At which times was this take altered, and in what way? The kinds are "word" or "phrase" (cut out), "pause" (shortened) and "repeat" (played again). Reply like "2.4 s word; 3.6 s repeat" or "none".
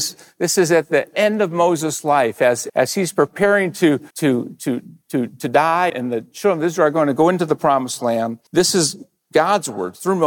2.7 s word; 4.1 s pause; 5.9 s word; 8.5 s pause